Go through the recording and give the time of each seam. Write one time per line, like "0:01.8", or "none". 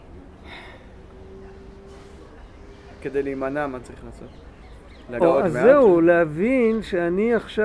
0:05.2